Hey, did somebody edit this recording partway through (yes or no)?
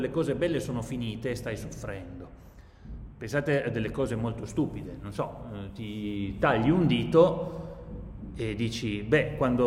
no